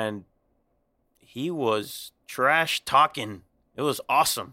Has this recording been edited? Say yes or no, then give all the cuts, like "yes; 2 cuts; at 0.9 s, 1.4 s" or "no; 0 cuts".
no; 0 cuts